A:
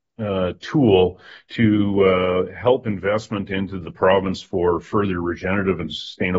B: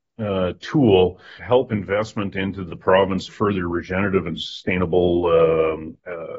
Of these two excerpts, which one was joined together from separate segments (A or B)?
B